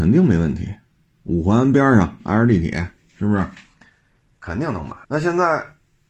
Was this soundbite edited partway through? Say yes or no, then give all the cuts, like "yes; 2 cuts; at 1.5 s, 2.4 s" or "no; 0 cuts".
yes; 1 cut; at 5.0 s